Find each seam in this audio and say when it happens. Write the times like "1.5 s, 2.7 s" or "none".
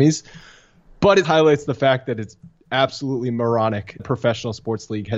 1.2 s, 4.0 s